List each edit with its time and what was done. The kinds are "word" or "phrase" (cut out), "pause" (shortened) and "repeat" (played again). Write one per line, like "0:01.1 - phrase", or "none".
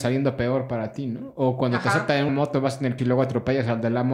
0:02.3 - word
0:03.0 - word